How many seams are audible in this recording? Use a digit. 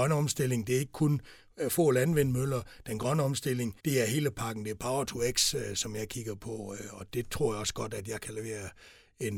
2